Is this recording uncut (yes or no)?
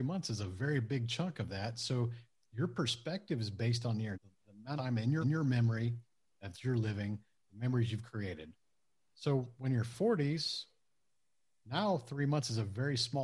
no